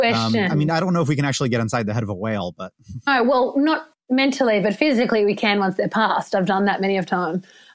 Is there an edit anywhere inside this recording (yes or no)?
no